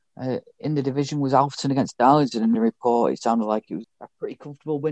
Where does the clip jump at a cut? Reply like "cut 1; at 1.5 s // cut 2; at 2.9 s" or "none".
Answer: cut 1; at 2.5 s // cut 2; at 3.8 s